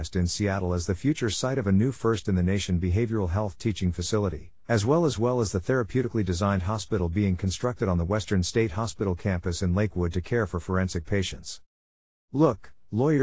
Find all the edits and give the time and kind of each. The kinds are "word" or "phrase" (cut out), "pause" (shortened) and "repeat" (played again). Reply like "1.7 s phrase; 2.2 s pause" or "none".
none